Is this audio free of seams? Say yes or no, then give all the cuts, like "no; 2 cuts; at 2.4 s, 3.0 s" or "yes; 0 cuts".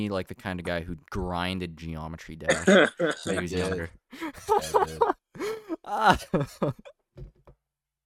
no; 1 cut; at 5.2 s